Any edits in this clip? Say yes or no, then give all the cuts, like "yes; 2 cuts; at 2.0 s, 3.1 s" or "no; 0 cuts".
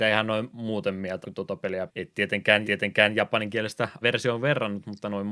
yes; 4 cuts; at 1.2 s, 1.9 s, 2.6 s, 4.0 s